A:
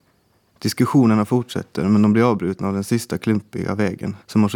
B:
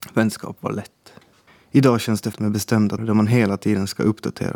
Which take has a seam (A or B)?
B